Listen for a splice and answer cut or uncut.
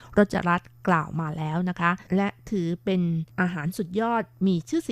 cut